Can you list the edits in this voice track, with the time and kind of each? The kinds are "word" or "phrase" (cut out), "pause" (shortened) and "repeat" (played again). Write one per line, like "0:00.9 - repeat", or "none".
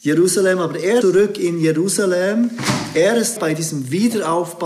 0:01.0 - word
0:03.4 - word